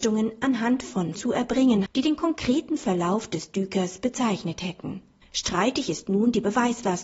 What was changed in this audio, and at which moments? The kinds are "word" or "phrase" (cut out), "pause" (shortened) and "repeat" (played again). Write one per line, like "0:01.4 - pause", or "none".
0:01.1 - word
0:01.9 - word
0:05.2 - pause